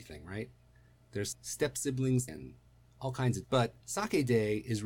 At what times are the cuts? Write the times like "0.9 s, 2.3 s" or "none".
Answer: 2.3 s, 3.4 s, 3.8 s